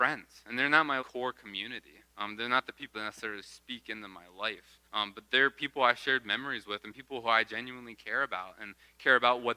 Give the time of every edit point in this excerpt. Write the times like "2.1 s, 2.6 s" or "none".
1.0 s, 2.1 s, 2.9 s, 4.8 s